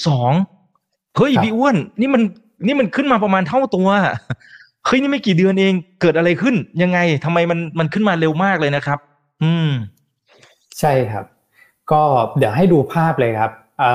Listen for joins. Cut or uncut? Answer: uncut